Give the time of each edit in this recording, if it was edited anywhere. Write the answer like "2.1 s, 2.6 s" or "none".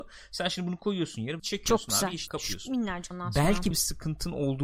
1.4 s, 2.3 s, 3.1 s, 3.7 s